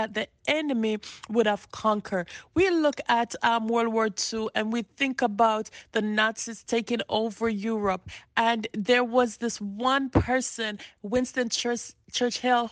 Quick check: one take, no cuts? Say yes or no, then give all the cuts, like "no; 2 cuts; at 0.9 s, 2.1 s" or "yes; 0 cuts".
yes; 0 cuts